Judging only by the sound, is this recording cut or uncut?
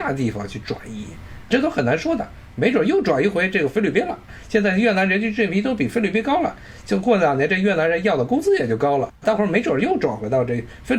cut